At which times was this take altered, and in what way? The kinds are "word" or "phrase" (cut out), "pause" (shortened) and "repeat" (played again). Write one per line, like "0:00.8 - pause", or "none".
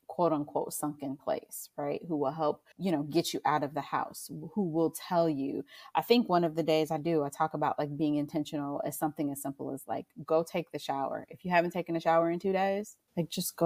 0:02.7 - pause